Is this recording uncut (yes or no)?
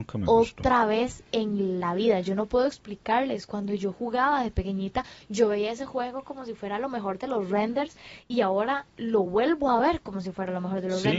yes